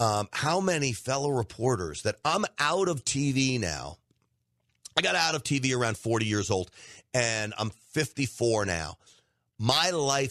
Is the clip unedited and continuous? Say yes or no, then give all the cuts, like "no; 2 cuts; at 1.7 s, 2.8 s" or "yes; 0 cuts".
yes; 0 cuts